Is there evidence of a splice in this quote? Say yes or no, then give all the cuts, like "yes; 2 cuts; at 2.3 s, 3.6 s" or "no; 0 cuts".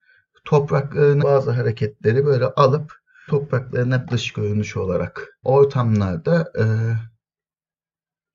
yes; 4 cuts; at 1.2 s, 3.3 s, 4.0 s, 5.4 s